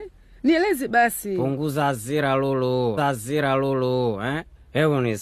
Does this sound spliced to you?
yes; 1 cut; at 3.0 s

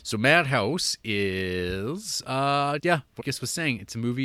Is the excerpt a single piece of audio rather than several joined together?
no; 2 cuts; at 2.8 s, 3.2 s

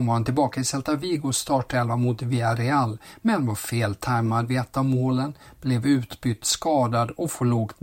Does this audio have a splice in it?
no; 0 cuts

